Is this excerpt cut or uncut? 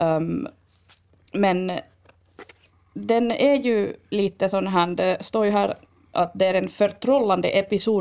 uncut